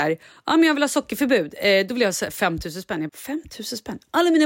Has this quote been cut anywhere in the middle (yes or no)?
yes